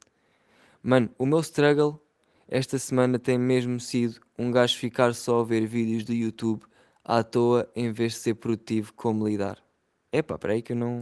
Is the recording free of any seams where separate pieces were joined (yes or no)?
yes